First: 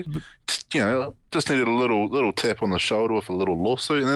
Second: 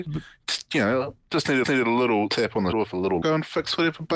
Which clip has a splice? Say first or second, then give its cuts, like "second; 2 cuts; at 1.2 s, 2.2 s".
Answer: second; 4 cuts; at 1.6 s, 2.3 s, 2.7 s, 3.2 s